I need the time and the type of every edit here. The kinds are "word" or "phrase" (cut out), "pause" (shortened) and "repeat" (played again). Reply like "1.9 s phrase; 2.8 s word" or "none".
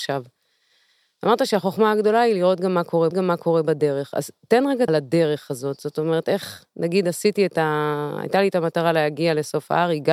3.1 s repeat; 4.9 s phrase